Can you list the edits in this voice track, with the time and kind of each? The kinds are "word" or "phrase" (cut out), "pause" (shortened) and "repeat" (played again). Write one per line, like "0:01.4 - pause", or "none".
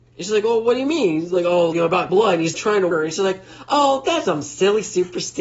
0:01.7 - word
0:02.1 - word
0:02.5 - word
0:02.9 - word
0:04.3 - word